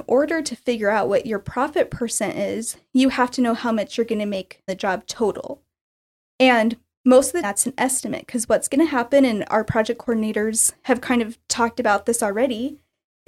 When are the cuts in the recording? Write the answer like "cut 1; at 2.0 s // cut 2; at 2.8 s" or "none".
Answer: cut 1; at 4.7 s // cut 2; at 7.4 s